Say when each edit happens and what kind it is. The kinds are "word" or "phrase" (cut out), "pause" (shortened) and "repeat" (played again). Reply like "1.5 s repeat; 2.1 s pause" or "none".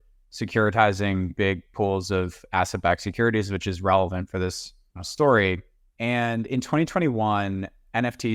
none